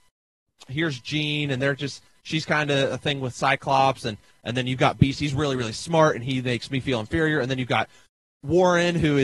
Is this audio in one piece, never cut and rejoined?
yes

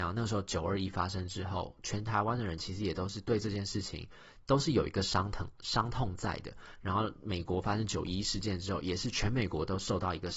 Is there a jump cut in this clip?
no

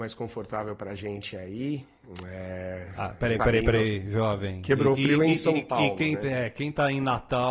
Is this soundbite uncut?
no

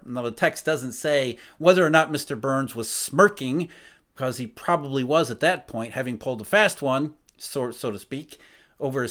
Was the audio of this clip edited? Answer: no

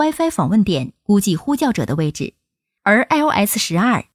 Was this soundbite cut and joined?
no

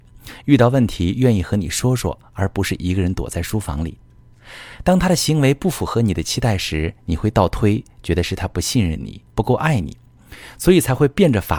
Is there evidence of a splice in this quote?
yes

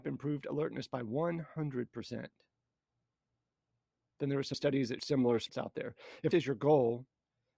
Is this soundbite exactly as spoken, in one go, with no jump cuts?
no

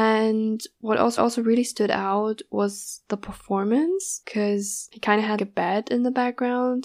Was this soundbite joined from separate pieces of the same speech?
yes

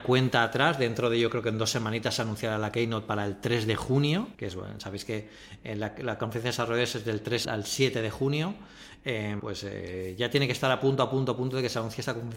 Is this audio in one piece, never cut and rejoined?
no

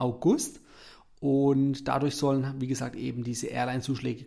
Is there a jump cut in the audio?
no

